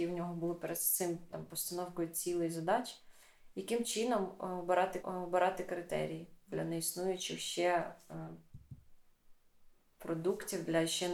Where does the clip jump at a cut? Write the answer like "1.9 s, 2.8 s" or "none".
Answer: 5.0 s

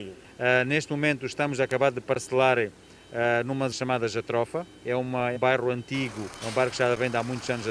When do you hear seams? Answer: 3.7 s, 5.4 s, 6.3 s

